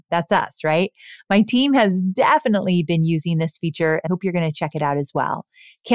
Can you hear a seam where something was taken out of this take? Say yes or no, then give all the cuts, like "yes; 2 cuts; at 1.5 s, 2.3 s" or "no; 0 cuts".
yes; 1 cut; at 4.1 s